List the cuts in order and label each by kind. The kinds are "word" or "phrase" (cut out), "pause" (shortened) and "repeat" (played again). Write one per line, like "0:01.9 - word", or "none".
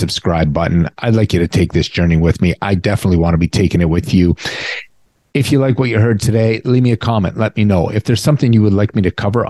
0:05.1 - pause